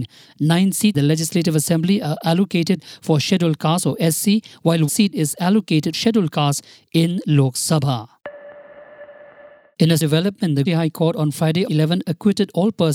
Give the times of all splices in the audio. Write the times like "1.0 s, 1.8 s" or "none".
0.9 s, 4.9 s, 5.9 s, 10.0 s, 10.7 s, 11.7 s